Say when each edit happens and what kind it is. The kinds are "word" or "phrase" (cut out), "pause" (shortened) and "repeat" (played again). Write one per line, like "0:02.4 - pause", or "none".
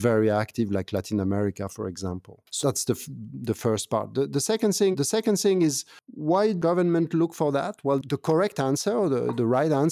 0:02.5 - pause
0:04.9 - repeat